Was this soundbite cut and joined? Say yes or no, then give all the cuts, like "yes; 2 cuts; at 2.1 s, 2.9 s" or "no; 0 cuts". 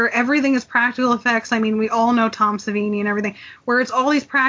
no; 0 cuts